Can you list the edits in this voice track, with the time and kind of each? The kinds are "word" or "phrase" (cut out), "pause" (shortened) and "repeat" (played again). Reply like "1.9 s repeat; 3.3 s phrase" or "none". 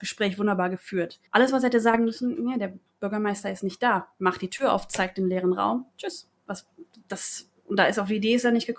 1.3 s pause